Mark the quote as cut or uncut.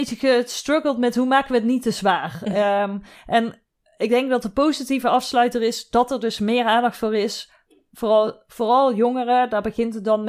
uncut